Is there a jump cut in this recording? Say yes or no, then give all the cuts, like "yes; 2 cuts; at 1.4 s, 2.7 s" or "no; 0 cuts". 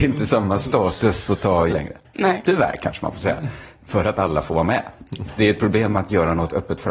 yes; 1 cut; at 1.7 s